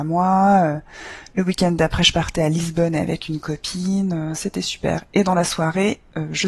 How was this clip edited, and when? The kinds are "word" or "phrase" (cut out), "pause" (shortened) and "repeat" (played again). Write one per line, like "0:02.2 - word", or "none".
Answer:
none